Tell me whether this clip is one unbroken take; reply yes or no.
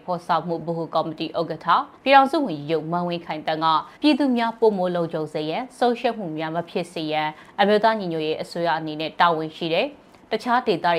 no